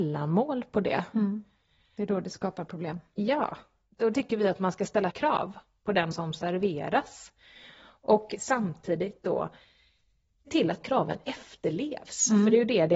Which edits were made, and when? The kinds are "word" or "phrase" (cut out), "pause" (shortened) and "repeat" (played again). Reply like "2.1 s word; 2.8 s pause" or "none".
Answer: 4.1 s word; 5.1 s word; 6.1 s word; 10.5 s word; 10.8 s word

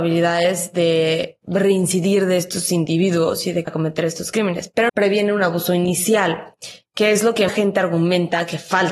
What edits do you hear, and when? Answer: 3.7 s word; 4.9 s word; 7.5 s word

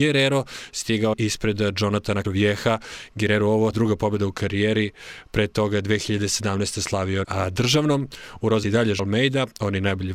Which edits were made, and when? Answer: 1.1 s word; 2.2 s word; 3.7 s word; 7.2 s word; 8.6 s word; 9.0 s word

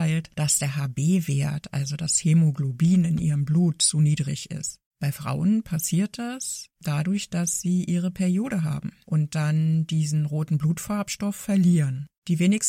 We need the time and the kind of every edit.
none

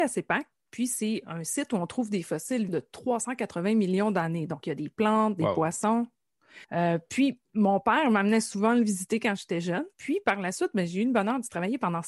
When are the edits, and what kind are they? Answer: 2.7 s word; 6.6 s pause; 7.4 s pause; 9.9 s pause

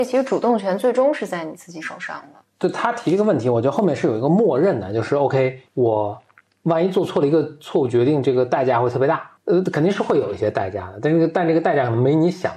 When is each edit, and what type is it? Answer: 5.7 s pause

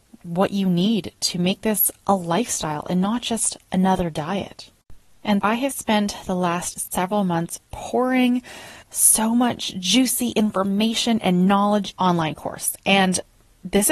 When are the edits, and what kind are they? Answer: 5.4 s word; 8.8 s pause; 12.0 s phrase

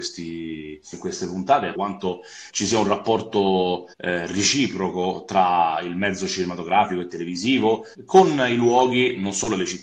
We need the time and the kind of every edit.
0.9 s phrase; 1.7 s word; 2.5 s word; 3.9 s pause; 7.9 s pause

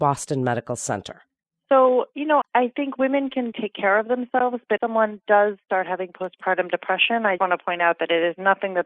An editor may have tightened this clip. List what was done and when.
2.4 s word; 3.5 s word; 4.8 s word; 7.4 s word

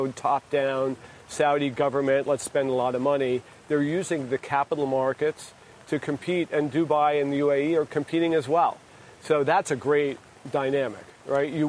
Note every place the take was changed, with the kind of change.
none

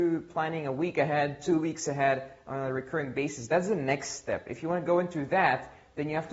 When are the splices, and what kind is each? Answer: none

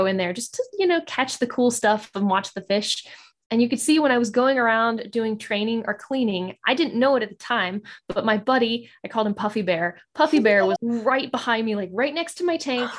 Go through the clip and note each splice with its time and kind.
10.8 s word

